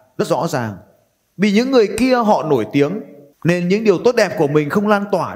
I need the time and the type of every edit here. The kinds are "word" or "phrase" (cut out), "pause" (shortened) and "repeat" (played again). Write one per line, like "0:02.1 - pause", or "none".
none